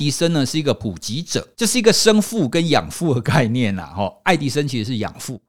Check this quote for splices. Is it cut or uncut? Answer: cut